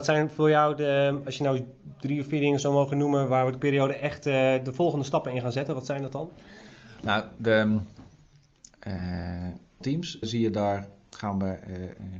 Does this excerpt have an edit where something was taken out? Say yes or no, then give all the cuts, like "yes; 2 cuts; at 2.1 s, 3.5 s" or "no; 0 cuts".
yes; 3 cuts; at 3.6 s, 9.8 s, 10.2 s